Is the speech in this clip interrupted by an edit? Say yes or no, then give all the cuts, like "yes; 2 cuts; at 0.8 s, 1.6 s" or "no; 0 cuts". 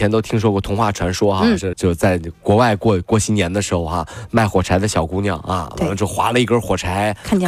yes; 1 cut; at 1.7 s